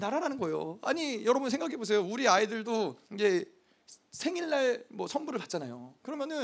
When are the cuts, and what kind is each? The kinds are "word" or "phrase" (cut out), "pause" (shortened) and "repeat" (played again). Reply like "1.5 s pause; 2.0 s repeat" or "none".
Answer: 3.1 s pause